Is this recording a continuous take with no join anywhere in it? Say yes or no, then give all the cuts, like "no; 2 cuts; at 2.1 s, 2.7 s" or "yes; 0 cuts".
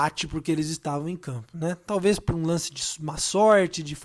yes; 0 cuts